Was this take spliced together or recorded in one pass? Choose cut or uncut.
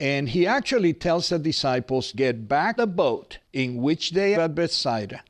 cut